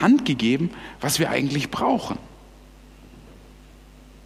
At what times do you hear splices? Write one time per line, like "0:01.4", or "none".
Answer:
none